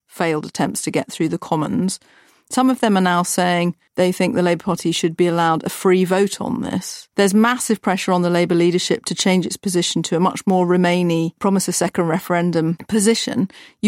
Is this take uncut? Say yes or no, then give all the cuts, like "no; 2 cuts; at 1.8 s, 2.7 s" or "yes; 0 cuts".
yes; 0 cuts